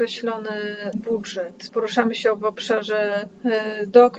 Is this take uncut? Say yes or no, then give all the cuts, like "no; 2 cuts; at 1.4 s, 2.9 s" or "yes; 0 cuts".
no; 2 cuts; at 0.9 s, 1.7 s